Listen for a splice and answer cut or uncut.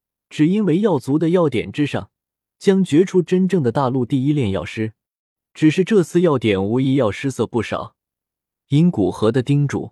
uncut